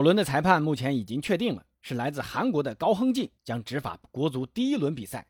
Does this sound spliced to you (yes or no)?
yes